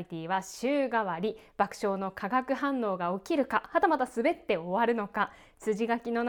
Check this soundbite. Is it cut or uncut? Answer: uncut